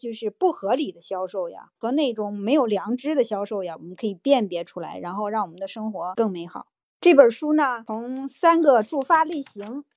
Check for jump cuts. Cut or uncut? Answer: cut